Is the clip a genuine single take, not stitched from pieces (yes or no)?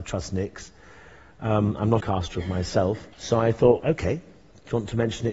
no